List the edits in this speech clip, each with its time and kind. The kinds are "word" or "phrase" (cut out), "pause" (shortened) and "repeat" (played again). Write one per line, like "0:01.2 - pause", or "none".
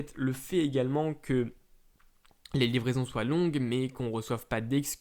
none